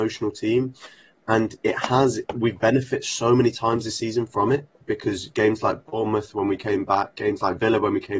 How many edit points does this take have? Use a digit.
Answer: 0